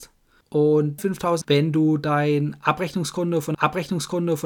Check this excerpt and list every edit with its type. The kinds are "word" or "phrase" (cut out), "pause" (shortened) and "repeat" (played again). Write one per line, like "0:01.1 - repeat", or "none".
0:01.0 - word
0:01.4 - word
0:03.5 - repeat